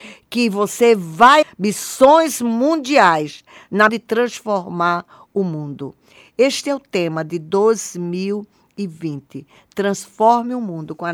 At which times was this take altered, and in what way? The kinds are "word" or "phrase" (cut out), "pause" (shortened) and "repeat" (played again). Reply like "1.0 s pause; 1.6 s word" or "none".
1.4 s word; 3.9 s word